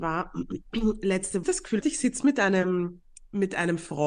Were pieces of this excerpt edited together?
yes; 2 cuts; at 1.4 s, 1.8 s

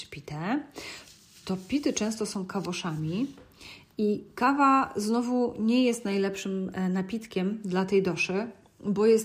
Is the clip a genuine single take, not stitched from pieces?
yes; 0 cuts

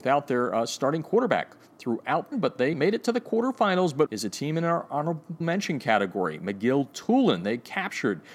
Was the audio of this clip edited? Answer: yes; 4 cuts; at 2.3 s, 2.7 s, 4.1 s, 5.4 s

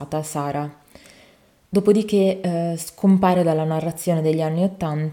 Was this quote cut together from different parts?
no; 0 cuts

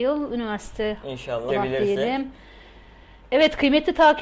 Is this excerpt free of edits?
no; 1 cut; at 1.5 s

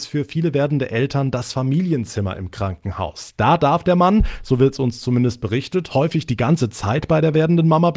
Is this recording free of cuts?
yes; 0 cuts

